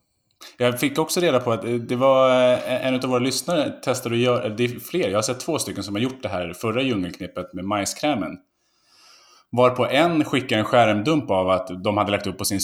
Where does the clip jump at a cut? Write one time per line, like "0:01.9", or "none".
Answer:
none